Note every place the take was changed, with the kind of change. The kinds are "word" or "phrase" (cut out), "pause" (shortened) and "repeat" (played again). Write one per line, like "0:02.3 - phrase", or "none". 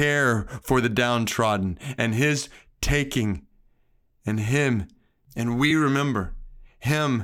none